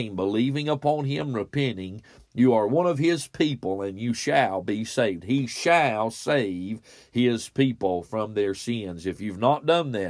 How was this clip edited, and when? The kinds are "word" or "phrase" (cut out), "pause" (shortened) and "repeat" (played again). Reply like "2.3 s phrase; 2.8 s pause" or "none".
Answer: none